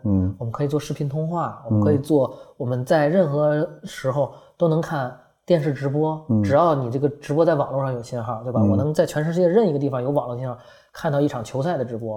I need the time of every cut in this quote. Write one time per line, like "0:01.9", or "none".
none